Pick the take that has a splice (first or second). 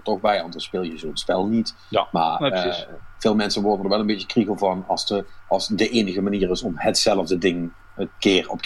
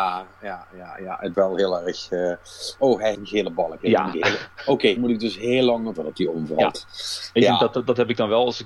second